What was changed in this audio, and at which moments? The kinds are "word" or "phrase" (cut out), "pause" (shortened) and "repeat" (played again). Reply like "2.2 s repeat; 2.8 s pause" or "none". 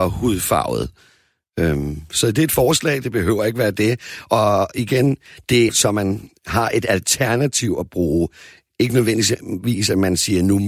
5.7 s word